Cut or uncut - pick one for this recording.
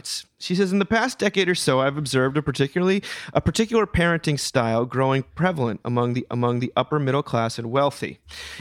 cut